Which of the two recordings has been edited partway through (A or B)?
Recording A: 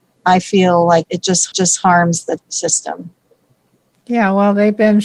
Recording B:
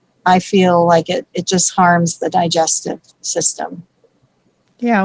A